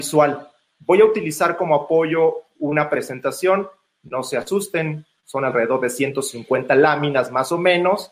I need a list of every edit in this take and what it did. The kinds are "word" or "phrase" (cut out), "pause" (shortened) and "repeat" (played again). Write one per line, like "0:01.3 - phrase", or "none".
none